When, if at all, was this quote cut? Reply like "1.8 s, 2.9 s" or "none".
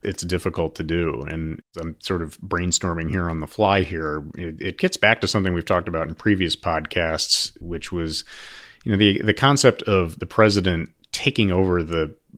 none